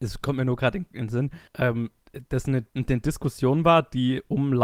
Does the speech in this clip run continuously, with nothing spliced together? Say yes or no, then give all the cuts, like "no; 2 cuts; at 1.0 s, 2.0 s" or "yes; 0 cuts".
no; 2 cuts; at 1.5 s, 2.7 s